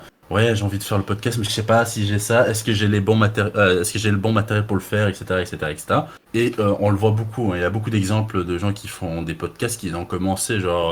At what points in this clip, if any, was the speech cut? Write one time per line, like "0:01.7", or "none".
0:06.2